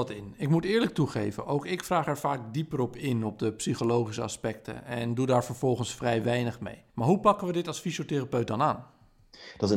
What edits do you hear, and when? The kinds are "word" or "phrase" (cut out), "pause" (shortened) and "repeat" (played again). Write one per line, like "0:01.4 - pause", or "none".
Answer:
0:06.9 - pause